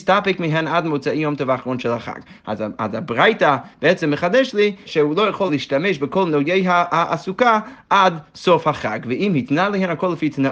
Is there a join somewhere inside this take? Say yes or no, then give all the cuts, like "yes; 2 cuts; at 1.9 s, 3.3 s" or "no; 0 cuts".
yes; 2 cuts; at 4.8 s, 5.5 s